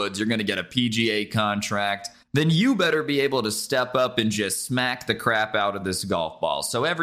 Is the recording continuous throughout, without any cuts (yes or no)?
yes